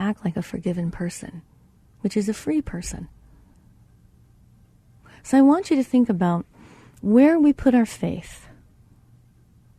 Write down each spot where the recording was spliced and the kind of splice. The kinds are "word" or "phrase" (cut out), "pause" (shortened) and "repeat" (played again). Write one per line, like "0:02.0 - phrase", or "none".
none